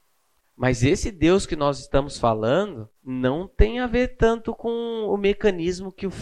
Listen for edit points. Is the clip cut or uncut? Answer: cut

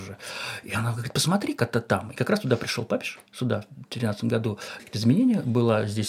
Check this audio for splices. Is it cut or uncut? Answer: cut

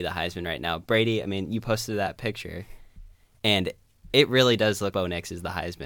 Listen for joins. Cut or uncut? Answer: cut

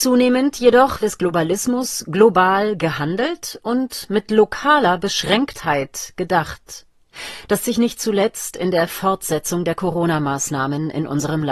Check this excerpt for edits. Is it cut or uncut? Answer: cut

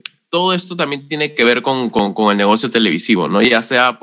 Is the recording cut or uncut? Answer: uncut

